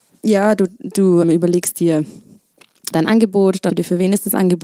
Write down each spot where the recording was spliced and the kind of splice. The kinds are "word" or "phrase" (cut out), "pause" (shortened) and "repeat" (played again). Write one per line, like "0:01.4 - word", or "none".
0:01.2 - word
0:02.9 - word
0:03.7 - word